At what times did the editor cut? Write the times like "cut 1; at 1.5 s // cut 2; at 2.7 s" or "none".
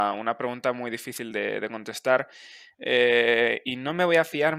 none